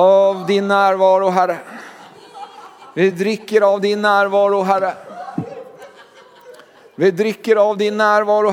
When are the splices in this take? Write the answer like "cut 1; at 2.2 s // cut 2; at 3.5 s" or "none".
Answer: none